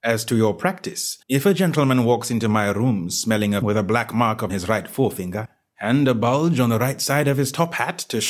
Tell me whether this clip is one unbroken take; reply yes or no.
no